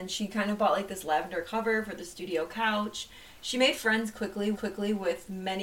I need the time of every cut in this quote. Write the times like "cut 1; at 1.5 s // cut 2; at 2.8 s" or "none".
cut 1; at 4.5 s